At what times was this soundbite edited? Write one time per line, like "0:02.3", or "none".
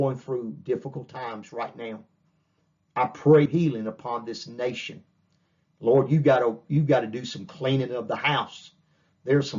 0:03.5